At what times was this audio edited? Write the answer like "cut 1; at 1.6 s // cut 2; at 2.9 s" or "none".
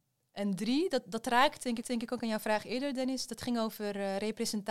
cut 1; at 1.8 s